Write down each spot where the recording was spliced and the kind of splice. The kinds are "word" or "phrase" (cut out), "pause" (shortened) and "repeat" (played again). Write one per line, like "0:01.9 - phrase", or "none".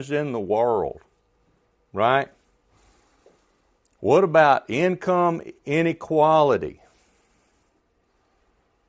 none